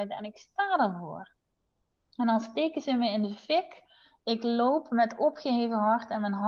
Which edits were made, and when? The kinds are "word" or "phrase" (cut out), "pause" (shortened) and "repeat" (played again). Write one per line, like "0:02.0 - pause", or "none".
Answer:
none